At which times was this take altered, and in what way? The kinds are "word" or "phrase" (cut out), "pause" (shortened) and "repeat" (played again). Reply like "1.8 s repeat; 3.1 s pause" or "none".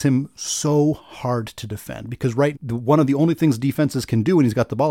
2.5 s word

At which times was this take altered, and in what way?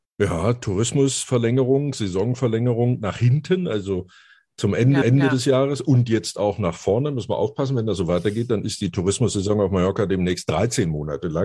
5.0 s repeat

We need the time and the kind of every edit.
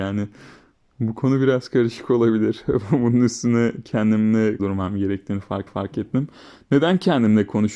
4.6 s phrase; 5.7 s repeat

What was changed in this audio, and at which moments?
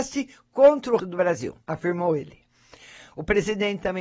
1.0 s word; 1.6 s pause

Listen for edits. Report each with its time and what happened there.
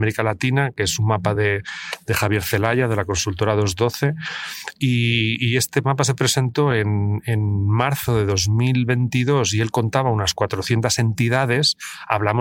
none

